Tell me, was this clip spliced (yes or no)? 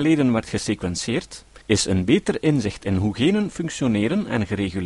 yes